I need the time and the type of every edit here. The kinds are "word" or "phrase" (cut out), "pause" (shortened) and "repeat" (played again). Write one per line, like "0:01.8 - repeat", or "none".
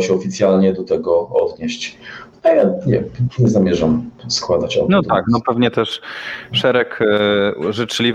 none